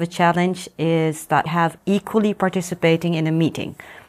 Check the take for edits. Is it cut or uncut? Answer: cut